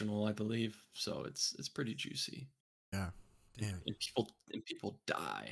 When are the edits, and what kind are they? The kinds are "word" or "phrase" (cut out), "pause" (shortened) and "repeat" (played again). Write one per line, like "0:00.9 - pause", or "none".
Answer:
none